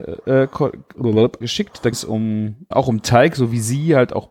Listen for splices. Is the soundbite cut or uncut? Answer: cut